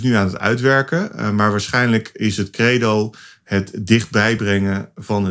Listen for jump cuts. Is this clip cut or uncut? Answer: uncut